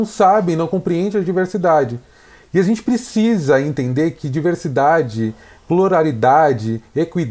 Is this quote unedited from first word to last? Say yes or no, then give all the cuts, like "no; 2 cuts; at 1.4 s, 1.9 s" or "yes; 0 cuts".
yes; 0 cuts